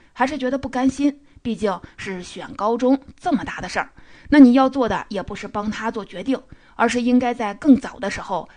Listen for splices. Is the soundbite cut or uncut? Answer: uncut